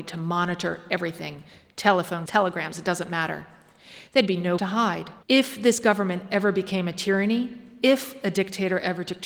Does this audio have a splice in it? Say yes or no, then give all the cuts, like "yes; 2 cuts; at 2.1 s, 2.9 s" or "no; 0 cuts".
yes; 3 cuts; at 2.3 s, 4.6 s, 5.2 s